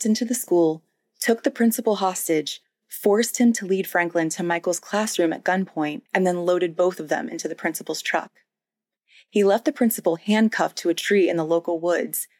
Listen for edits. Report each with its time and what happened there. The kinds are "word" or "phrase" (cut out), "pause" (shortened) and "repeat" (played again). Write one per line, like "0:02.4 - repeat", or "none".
0:06.1 - pause